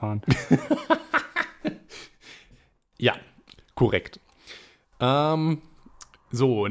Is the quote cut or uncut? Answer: uncut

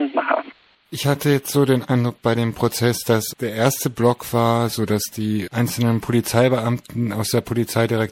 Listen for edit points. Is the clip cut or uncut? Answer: uncut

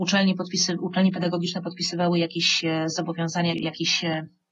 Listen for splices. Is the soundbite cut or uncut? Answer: cut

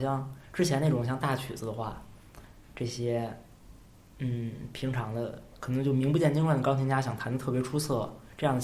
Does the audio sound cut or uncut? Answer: cut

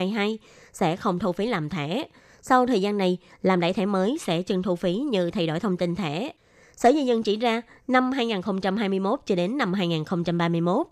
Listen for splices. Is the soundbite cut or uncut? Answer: uncut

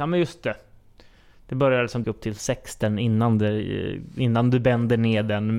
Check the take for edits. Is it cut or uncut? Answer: cut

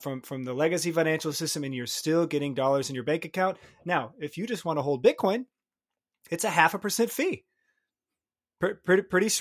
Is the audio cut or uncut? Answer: uncut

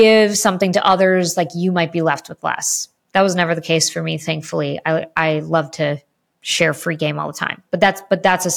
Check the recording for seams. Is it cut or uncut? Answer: uncut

